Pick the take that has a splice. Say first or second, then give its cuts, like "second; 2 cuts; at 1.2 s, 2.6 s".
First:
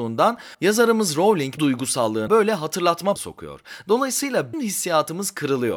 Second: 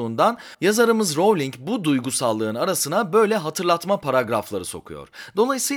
first; 4 cuts; at 1.6 s, 2.3 s, 3.2 s, 4.5 s